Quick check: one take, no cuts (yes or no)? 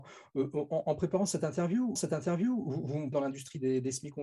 no